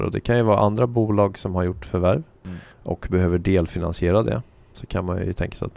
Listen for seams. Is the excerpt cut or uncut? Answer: cut